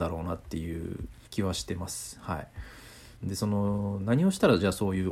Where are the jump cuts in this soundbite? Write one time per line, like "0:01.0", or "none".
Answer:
0:01.3
0:03.2